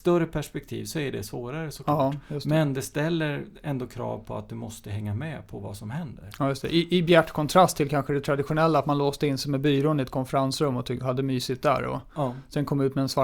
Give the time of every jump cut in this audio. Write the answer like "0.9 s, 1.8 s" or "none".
none